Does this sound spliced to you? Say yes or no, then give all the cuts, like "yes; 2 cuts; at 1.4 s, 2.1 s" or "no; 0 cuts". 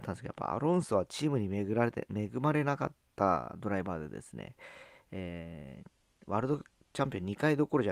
yes; 1 cut; at 3.0 s